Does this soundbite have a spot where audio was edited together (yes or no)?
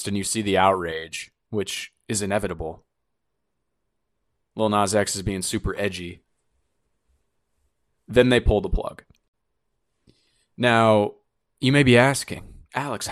no